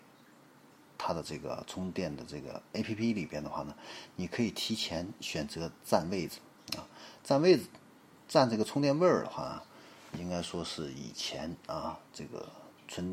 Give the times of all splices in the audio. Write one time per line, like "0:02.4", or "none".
0:10.1